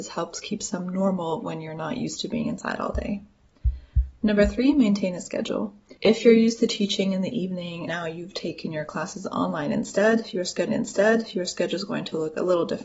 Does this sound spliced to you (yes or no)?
yes